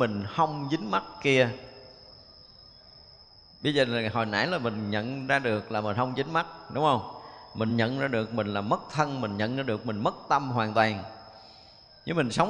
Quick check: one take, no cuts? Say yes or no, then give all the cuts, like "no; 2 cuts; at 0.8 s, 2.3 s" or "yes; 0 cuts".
yes; 0 cuts